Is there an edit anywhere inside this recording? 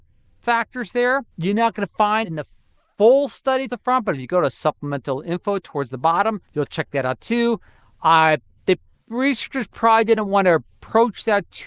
yes; 4 cuts; at 1.3 s, 2.2 s, 3.7 s, 6.5 s

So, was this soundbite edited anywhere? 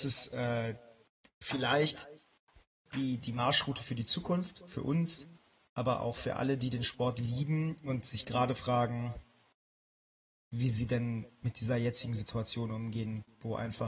no; 0 cuts

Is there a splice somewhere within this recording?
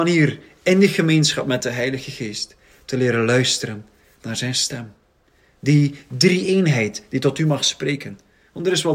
no; 0 cuts

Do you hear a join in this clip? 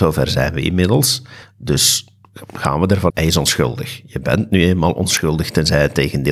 yes; 1 cut; at 3.1 s

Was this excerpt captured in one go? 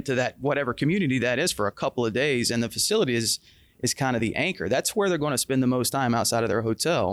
yes; 0 cuts

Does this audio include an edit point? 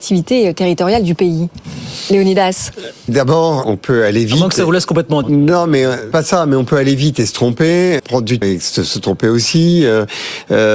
yes; 6 cuts; at 3.1 s, 3.6 s, 5.2 s, 6.1 s, 8.0 s, 8.4 s

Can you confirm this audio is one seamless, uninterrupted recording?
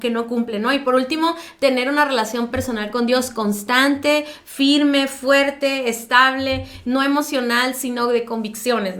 yes; 0 cuts

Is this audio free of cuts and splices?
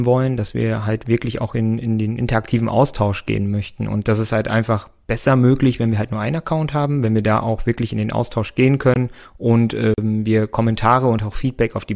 yes; 0 cuts

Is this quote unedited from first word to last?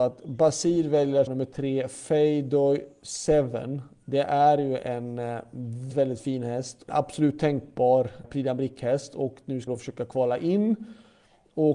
no; 5 cuts; at 1.3 s, 5.9 s, 6.9 s, 8.2 s, 9.7 s

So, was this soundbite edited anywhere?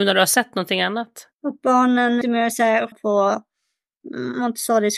yes; 3 cuts; at 1.3 s, 2.2 s, 2.9 s

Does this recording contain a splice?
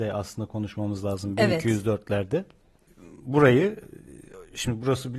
no; 0 cuts

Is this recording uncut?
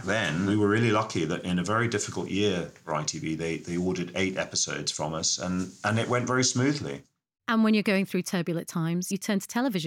yes; 0 cuts

